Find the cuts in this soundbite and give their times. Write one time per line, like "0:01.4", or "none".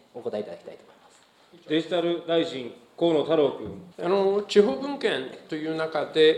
0:03.9